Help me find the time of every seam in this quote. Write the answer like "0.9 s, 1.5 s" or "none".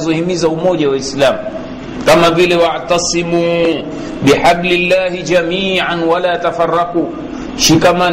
none